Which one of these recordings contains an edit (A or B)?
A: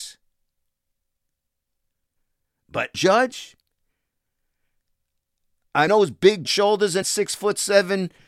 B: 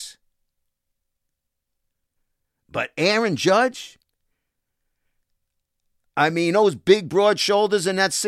A